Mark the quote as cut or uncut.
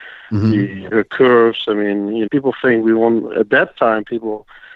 cut